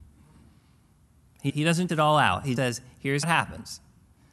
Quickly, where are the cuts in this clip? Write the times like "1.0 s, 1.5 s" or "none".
1.5 s, 1.9 s, 2.6 s, 3.2 s

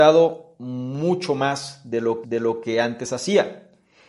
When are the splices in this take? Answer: 2.2 s

